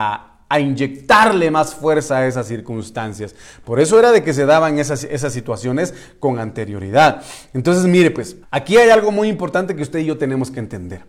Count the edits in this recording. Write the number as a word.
one